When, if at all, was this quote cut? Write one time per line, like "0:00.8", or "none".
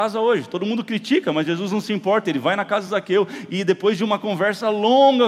none